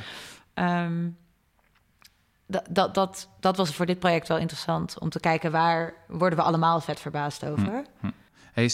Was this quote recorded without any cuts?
yes; 0 cuts

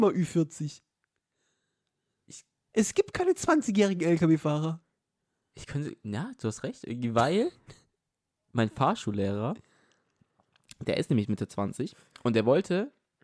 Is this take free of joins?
yes; 0 cuts

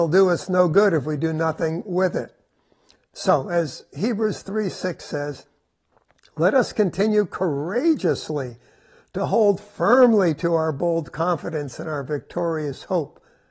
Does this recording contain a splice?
no; 0 cuts

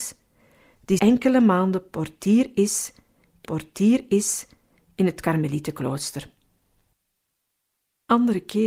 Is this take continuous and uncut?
no; 2 cuts; at 1.0 s, 3.4 s

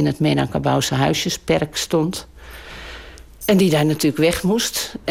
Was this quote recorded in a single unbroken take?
yes; 0 cuts

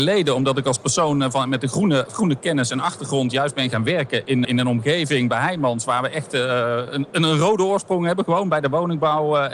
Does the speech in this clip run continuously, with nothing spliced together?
no; 1 cut; at 4.4 s

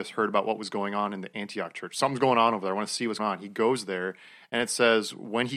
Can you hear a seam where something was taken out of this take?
yes; 1 cut; at 3.2 s

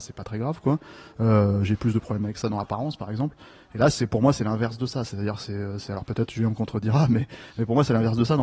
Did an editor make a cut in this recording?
no; 0 cuts

